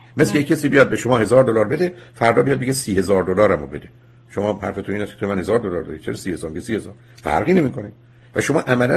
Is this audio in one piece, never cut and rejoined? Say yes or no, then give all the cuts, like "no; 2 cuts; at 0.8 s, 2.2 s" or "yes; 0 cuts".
yes; 0 cuts